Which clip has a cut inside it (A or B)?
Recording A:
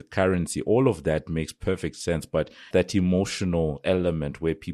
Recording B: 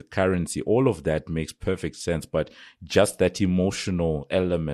A